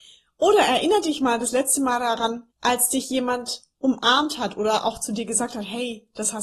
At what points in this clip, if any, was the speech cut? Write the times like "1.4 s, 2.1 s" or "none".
2.5 s